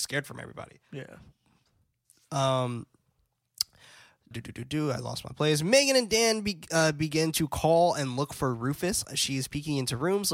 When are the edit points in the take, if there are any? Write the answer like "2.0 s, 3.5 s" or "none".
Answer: 4.3 s